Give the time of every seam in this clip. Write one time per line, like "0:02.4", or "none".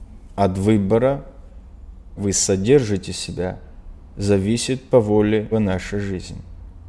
0:02.2
0:05.5